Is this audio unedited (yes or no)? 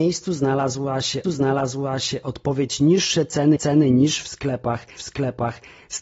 no